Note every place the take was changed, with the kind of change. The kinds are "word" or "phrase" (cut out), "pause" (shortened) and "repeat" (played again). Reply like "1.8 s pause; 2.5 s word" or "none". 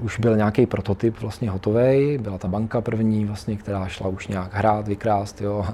2.5 s word